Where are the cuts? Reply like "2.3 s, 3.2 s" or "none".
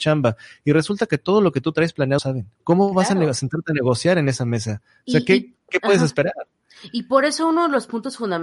2.2 s, 2.5 s